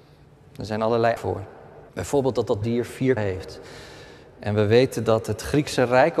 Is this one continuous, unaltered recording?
no; 4 cuts; at 1.2 s, 1.9 s, 2.6 s, 3.2 s

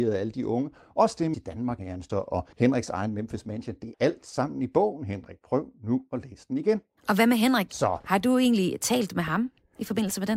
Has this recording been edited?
yes; 6 cuts; at 1.3 s, 1.8 s, 2.1 s, 2.5 s, 3.9 s, 7.0 s

